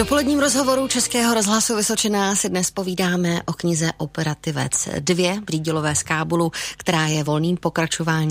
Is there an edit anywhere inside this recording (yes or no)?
no